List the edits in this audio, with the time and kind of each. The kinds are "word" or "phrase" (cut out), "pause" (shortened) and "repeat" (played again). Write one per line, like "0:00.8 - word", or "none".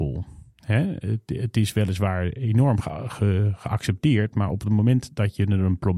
none